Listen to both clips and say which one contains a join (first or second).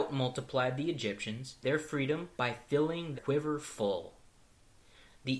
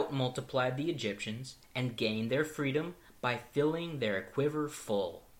first